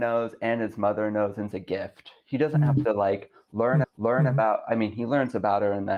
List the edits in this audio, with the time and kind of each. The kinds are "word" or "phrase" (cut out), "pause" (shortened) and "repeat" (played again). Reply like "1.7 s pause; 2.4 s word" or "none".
1.5 s phrase; 3.8 s repeat